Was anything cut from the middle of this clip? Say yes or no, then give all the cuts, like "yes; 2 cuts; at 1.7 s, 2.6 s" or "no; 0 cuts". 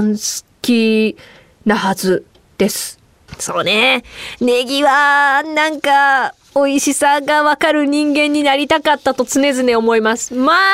no; 0 cuts